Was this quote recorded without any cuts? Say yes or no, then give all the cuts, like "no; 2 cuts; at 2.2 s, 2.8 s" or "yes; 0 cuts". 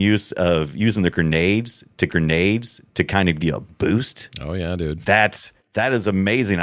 no; 3 cuts; at 2.1 s, 3.4 s, 5.6 s